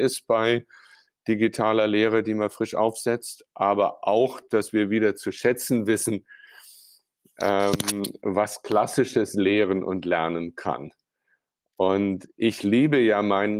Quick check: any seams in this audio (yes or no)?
no